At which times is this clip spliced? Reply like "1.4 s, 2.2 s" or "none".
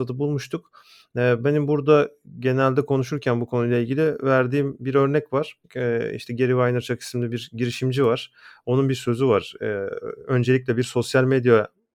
5.6 s